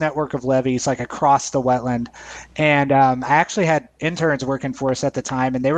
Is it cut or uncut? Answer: uncut